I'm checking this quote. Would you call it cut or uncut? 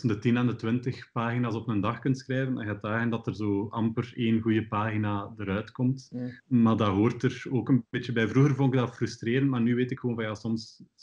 cut